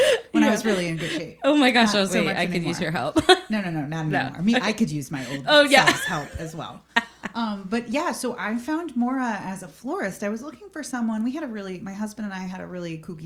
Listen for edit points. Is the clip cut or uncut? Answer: cut